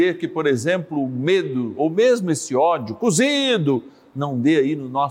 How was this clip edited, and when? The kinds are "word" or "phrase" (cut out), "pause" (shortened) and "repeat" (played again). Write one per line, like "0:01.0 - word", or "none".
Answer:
none